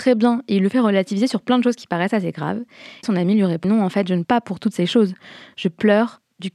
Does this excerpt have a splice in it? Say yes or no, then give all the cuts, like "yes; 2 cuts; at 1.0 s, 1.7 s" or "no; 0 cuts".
yes; 3 cuts; at 3.0 s, 3.6 s, 4.2 s